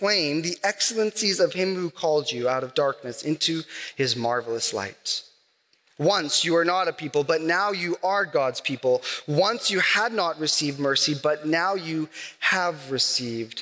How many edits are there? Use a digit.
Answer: 0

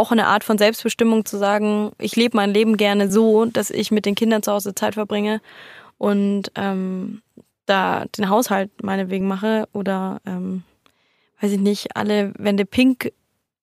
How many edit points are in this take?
0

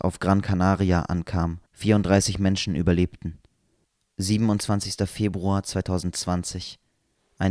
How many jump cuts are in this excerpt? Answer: 2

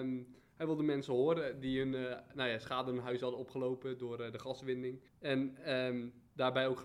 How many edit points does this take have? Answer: 1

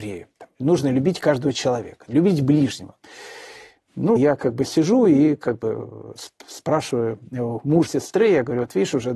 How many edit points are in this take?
2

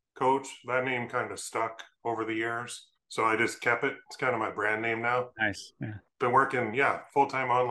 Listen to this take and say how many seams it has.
1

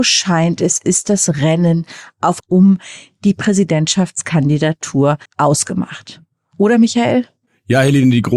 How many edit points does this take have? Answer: 2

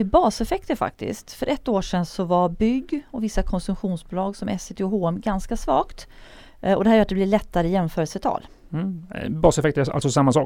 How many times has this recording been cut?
0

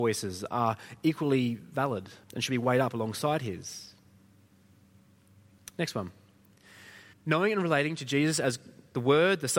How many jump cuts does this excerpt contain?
2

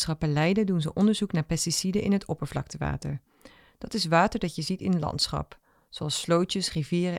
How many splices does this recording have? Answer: 0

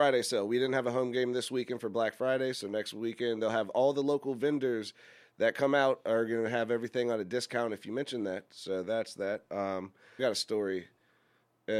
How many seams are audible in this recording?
1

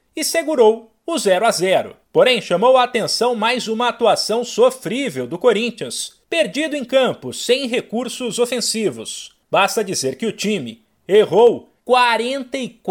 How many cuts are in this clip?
4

